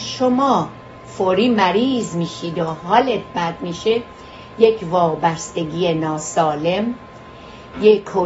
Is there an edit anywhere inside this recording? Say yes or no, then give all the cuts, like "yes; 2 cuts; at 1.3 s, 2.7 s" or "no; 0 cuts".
no; 0 cuts